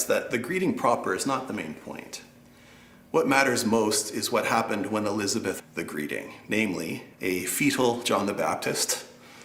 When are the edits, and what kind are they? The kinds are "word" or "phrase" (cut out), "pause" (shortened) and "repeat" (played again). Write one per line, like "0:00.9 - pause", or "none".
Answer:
0:05.6 - word
0:07.1 - pause